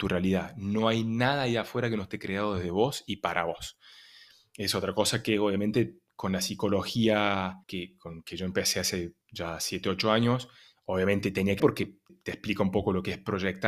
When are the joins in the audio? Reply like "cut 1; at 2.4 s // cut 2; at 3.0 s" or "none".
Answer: cut 1; at 7.6 s // cut 2; at 9.2 s // cut 3; at 11.6 s // cut 4; at 12.1 s